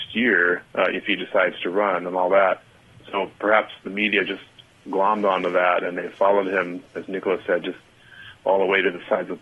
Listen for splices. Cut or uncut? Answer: uncut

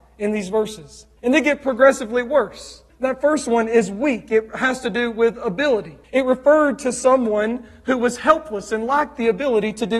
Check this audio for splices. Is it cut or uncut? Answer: cut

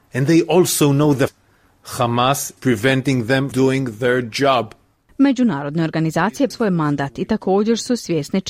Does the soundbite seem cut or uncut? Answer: cut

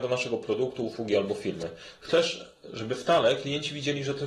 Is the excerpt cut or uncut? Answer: uncut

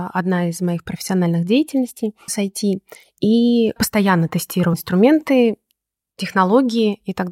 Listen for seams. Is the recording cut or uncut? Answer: cut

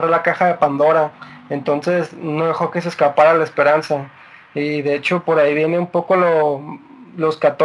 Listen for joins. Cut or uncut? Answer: uncut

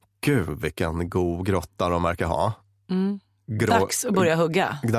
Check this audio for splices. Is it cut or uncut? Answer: uncut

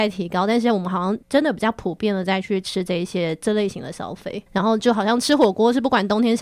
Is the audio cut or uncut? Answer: cut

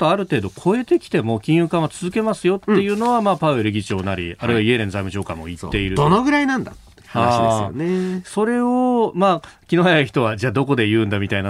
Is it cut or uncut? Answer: uncut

